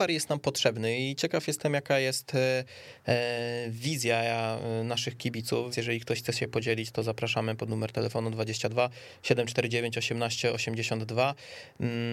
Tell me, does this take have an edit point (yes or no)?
yes